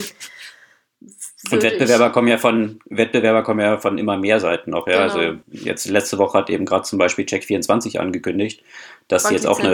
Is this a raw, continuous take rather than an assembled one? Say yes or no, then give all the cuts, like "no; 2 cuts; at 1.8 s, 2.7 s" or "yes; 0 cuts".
no; 1 cut; at 5.4 s